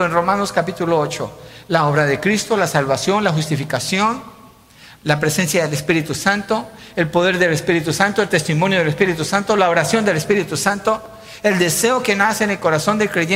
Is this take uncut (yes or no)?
yes